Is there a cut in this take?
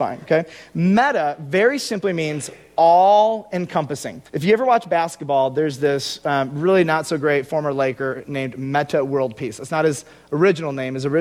yes; 1 cut; at 4.3 s

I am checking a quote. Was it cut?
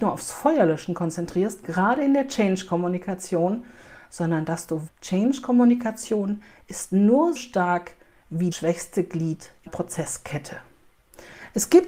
yes; 4 cuts; at 4.9 s, 7.4 s, 8.5 s, 9.7 s

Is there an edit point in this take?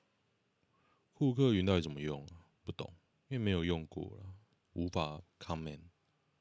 yes; 3 cuts; at 2.6 s, 3.1 s, 4.5 s

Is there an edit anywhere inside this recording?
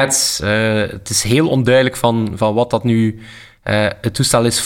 no; 0 cuts

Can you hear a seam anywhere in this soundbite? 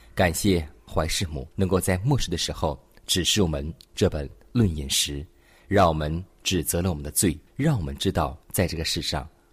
yes; 3 cuts; at 1.5 s, 7.5 s, 8.4 s

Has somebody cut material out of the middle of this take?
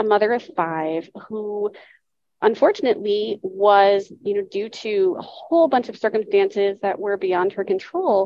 no; 0 cuts

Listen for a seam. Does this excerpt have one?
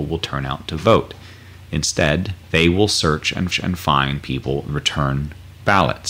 yes; 3 cuts; at 2.4 s, 3.5 s, 4.7 s

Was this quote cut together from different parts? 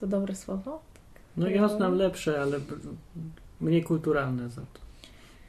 no; 0 cuts

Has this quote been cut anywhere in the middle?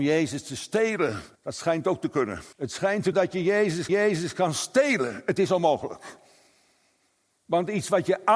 yes; 4 cuts; at 1.4 s, 2.5 s, 3.1 s, 3.9 s

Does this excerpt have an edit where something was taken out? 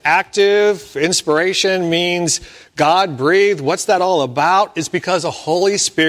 no; 0 cuts

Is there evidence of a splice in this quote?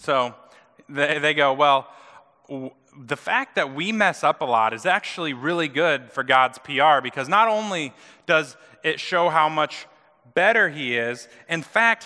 no; 0 cuts

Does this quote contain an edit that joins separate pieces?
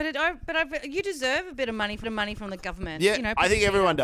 yes; 1 cut; at 2.0 s

